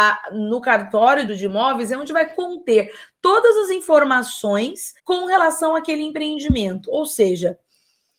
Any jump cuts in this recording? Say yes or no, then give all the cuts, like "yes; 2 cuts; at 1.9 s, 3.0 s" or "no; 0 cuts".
yes; 2 cuts; at 1.3 s, 5.0 s